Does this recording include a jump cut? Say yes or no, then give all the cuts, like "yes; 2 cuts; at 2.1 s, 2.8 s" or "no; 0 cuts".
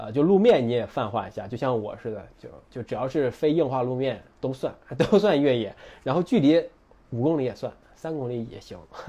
no; 0 cuts